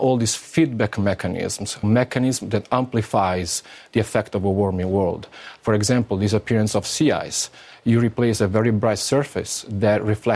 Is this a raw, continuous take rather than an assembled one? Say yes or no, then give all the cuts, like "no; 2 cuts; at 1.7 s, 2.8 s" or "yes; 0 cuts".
no; 1 cut; at 1.8 s